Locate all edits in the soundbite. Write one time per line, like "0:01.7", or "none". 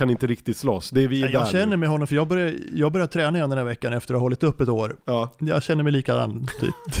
none

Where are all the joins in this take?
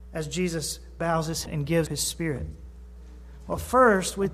0:01.4
0:01.9

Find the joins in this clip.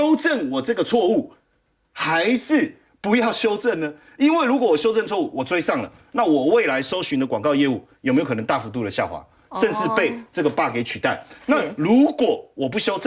none

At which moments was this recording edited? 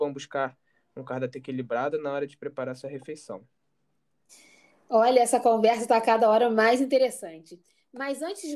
none

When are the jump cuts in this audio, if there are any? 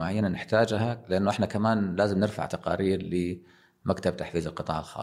none

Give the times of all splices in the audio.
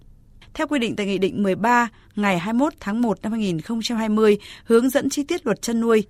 none

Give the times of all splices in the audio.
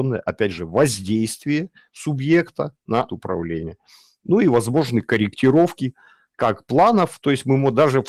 0:03.1

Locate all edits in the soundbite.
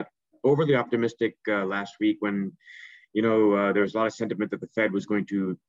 none

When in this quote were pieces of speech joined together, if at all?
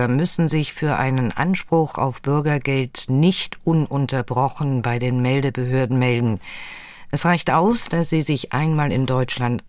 none

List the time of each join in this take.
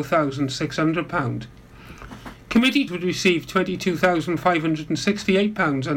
0:02.9

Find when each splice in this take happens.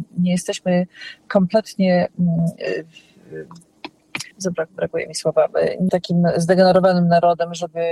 0:04.3
0:05.9

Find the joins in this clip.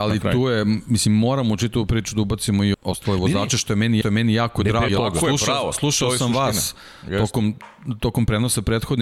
0:02.7
0:04.0
0:04.9

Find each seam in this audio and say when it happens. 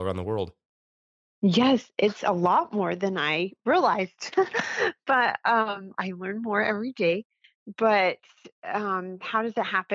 none

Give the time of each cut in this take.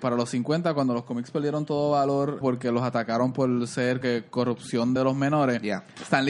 0:02.4
0:04.0
0:05.0

